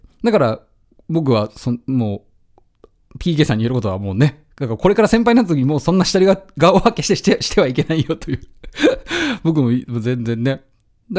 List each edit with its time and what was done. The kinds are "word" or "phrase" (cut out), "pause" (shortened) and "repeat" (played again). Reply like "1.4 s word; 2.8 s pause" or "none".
none